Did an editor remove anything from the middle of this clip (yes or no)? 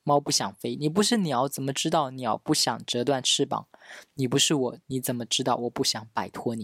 yes